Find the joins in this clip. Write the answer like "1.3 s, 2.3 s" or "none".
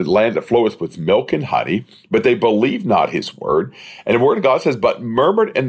none